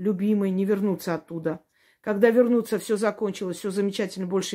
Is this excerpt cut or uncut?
uncut